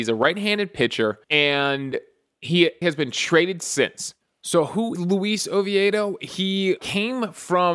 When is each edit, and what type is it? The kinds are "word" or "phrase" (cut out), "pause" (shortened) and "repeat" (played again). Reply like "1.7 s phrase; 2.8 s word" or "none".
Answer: 1.2 s pause; 2.8 s word; 3.6 s phrase; 4.2 s pause; 4.9 s word; 6.8 s word